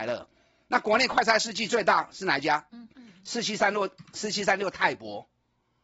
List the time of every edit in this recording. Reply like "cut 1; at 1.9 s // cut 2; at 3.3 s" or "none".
cut 1; at 2.7 s